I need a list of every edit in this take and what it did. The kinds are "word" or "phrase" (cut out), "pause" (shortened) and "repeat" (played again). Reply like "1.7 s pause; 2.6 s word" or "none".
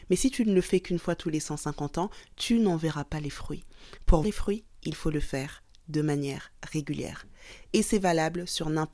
4.2 s word